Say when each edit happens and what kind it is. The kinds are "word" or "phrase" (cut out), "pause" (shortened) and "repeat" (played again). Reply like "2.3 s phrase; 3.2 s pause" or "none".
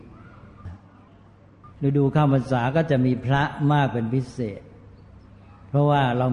1.7 s pause